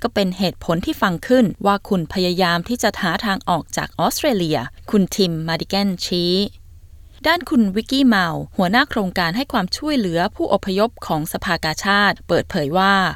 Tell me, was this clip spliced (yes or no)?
yes